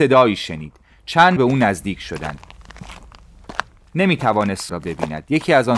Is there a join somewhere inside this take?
yes; 2 cuts; at 1.4 s, 4.7 s

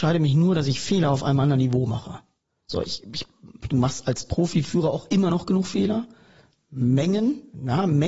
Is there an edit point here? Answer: no; 0 cuts

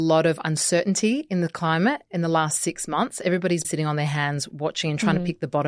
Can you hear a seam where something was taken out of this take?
yes; 1 cut; at 3.6 s

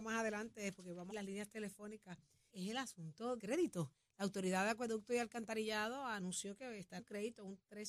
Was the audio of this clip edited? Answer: yes; 4 cuts; at 1.1 s, 2.5 s, 3.4 s, 7.0 s

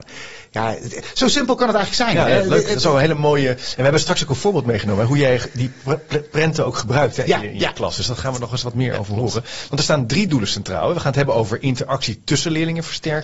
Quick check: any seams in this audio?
no; 0 cuts

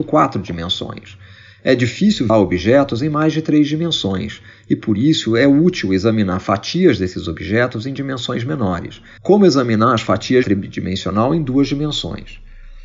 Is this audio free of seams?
no; 3 cuts; at 2.3 s, 9.2 s, 10.4 s

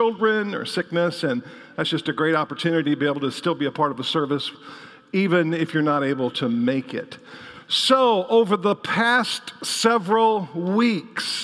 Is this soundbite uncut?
yes; 0 cuts

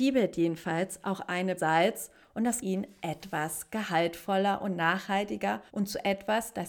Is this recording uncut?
no; 3 cuts; at 1.6 s, 2.6 s, 5.7 s

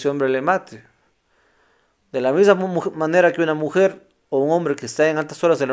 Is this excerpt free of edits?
yes; 0 cuts

